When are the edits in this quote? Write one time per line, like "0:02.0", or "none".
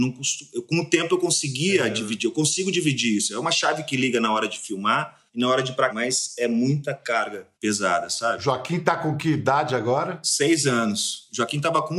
0:05.3
0:05.9
0:07.5